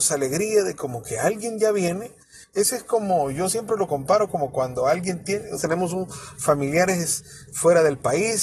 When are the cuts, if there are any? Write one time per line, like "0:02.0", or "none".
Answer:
0:05.6